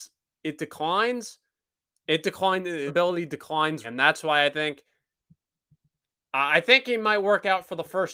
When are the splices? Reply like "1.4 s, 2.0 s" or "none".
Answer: 1.7 s, 2.9 s, 3.8 s